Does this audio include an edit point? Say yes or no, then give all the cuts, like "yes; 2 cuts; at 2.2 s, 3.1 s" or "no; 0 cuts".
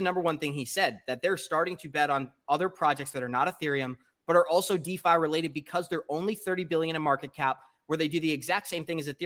no; 0 cuts